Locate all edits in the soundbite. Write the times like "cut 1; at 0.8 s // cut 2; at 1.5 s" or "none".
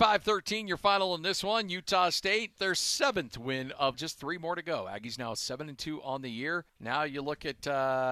cut 1; at 2.6 s // cut 2; at 3.9 s // cut 3; at 6.7 s